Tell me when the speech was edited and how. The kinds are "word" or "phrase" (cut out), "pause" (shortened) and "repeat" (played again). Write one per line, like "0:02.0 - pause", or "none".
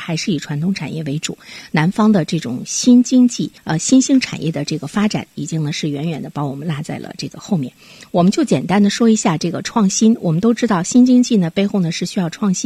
0:03.6 - pause

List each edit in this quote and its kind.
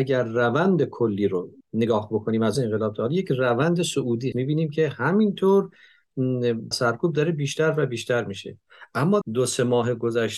0:01.6 - pause
0:02.5 - word
0:04.3 - word
0:06.7 - phrase
0:09.2 - word

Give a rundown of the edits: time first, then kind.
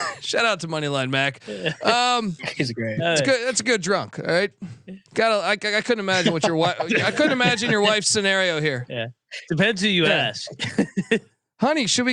none

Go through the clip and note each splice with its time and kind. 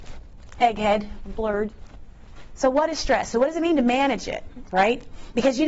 none

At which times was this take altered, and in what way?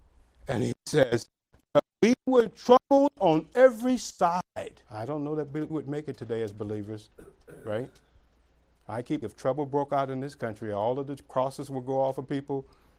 0:04.9 - pause
0:05.7 - word
0:09.2 - word

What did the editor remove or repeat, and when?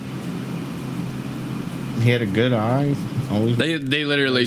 none

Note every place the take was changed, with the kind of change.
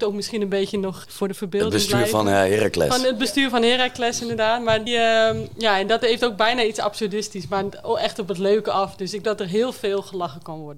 0:01.0 - word
0:04.9 - word
0:09.2 - phrase

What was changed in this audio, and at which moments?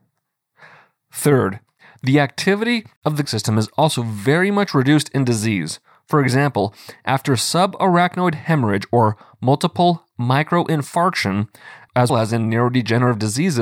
0:03.2 - word
0:12.1 - word

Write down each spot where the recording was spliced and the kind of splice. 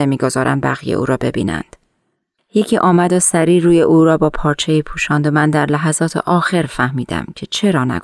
none

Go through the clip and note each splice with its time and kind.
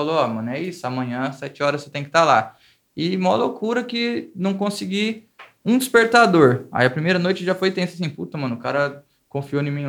none

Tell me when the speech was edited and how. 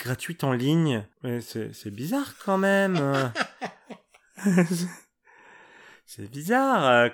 0:01.1 - pause

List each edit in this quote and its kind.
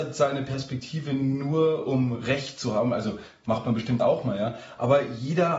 none

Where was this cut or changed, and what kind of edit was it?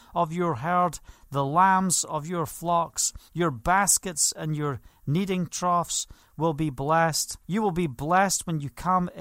0:03.3 - pause
0:07.4 - pause

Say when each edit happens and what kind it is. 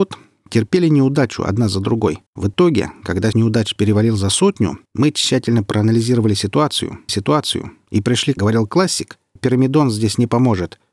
0:02.3 - pause
0:03.3 - word
0:04.9 - pause
0:07.1 - repeat
0:08.4 - phrase
0:09.4 - word

